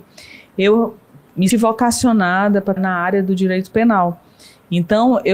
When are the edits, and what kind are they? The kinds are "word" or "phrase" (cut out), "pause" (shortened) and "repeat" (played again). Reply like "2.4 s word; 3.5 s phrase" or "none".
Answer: 1.5 s word; 2.8 s word